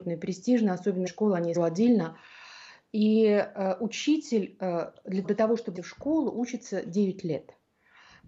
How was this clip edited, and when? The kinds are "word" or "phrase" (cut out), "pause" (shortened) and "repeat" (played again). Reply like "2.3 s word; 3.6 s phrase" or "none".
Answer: 1.1 s word; 1.6 s word; 5.2 s word; 5.8 s word